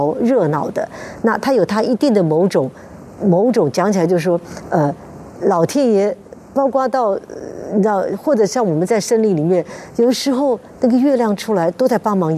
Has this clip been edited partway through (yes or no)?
no